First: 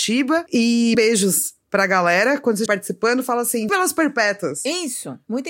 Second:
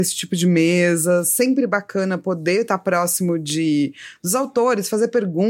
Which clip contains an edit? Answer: first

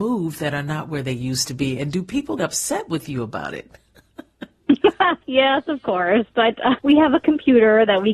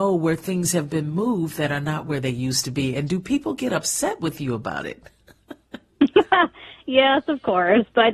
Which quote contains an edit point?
first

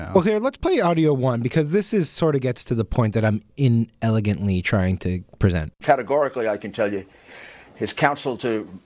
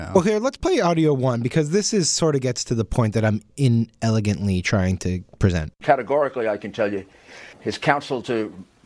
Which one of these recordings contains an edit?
second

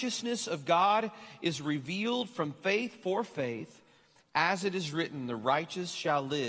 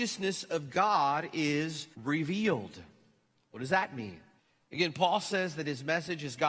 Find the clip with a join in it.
second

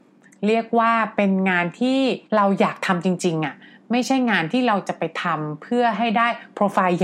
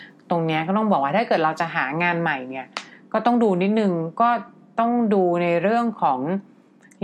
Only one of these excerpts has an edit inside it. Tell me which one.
first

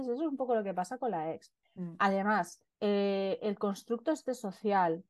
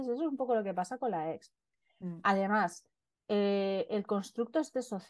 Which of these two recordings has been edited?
first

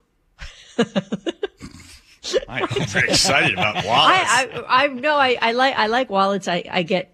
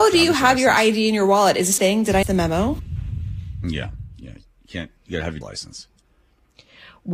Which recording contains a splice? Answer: second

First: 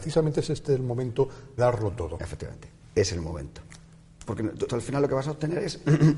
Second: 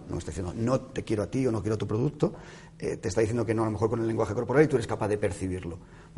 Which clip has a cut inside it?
first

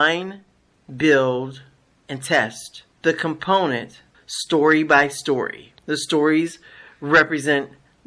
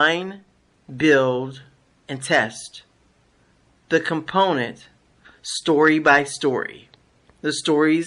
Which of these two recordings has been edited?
first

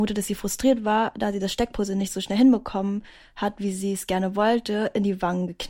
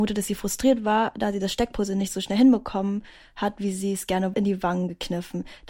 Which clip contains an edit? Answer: second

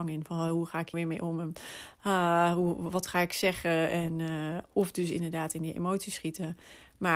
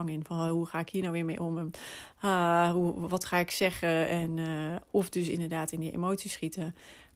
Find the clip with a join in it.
first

